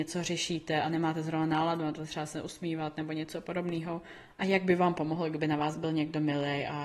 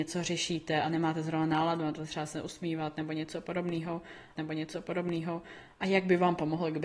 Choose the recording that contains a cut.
second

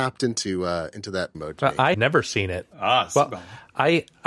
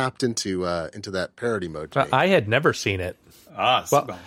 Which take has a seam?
first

